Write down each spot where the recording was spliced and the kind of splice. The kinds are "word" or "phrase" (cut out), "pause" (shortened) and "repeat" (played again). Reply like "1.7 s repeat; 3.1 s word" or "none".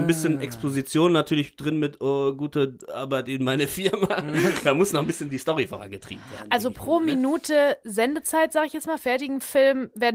none